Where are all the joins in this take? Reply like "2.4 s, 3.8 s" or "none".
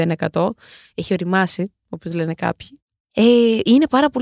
none